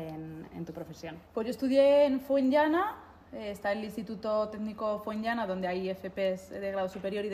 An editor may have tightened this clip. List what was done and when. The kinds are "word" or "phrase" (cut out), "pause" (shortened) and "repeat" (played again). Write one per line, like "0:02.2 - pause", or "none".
0:01.2 - pause